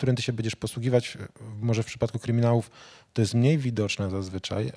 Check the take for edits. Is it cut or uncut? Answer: uncut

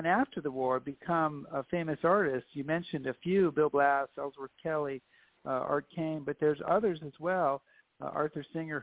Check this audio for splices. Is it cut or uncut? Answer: uncut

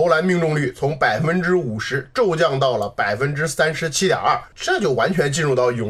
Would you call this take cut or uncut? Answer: cut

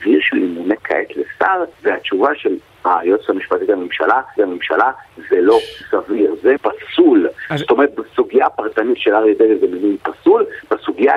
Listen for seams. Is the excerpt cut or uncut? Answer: cut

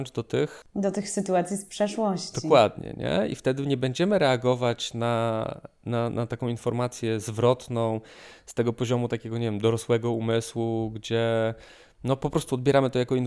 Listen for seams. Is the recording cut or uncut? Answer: uncut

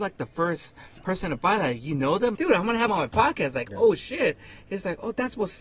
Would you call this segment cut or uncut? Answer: cut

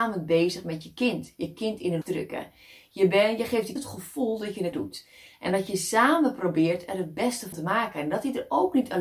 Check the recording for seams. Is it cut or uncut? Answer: cut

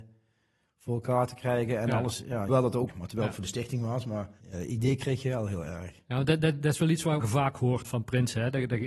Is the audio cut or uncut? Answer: cut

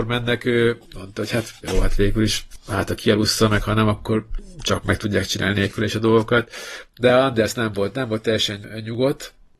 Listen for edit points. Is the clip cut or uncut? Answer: uncut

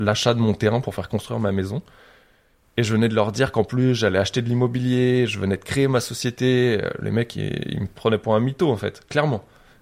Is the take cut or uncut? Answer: uncut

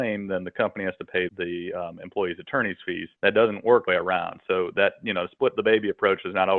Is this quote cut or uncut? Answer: cut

